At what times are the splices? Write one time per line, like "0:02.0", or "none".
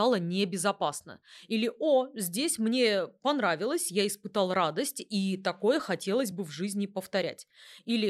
none